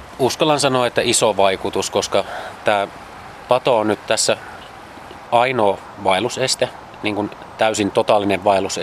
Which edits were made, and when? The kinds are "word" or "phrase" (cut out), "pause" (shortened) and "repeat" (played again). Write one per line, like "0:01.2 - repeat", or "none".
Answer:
0:05.3 - word